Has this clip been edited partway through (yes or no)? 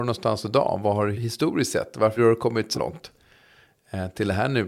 yes